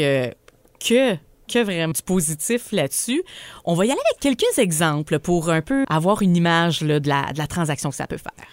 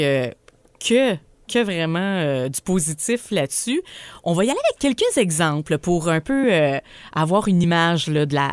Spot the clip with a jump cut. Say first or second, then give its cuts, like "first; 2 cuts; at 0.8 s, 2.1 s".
first; 2 cuts; at 1.9 s, 5.8 s